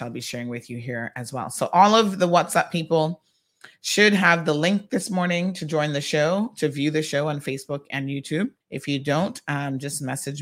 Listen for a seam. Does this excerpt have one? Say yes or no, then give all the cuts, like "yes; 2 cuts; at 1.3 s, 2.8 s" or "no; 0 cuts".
yes; 1 cut; at 8.6 s